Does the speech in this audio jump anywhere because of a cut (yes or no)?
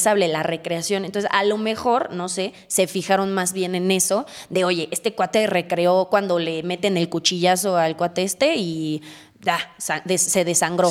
no